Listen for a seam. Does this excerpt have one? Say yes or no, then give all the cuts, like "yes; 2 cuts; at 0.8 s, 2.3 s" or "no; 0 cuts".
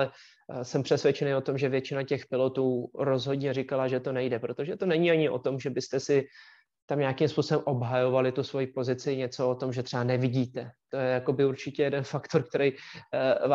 no; 0 cuts